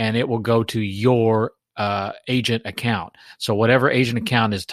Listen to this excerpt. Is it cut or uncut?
uncut